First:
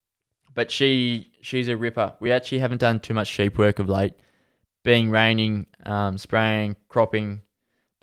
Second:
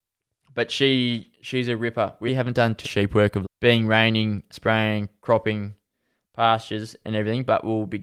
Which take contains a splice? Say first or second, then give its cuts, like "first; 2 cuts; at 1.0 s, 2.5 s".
second; 4 cuts; at 2.3 s, 2.8 s, 3.4 s, 4.5 s